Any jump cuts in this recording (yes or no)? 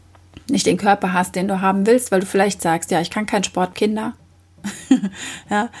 yes